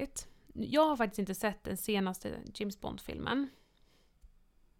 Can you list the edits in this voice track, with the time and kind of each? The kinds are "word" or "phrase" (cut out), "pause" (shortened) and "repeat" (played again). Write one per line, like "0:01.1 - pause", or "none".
none